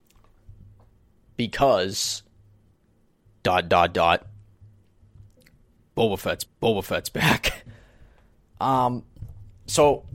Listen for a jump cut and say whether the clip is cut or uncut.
cut